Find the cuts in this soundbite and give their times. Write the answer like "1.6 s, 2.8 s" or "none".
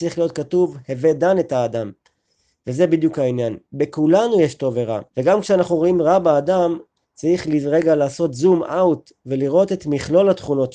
5.1 s